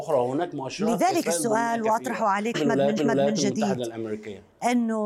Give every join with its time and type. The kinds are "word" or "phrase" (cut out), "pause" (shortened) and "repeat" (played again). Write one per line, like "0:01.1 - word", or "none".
0:01.2 - phrase
0:02.5 - phrase
0:03.0 - repeat